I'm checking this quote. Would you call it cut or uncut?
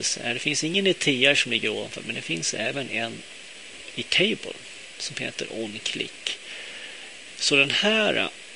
uncut